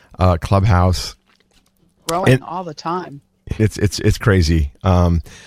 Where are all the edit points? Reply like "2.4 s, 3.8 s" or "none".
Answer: 3.6 s, 4.2 s